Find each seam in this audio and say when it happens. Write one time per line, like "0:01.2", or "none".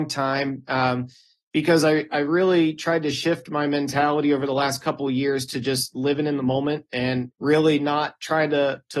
none